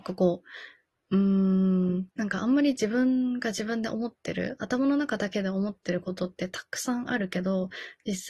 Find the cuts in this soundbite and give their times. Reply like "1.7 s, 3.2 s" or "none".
2.1 s